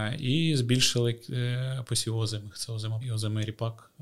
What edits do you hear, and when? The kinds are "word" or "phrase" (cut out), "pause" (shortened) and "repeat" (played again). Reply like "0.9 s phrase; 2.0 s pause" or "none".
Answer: 1.9 s word; 3.0 s word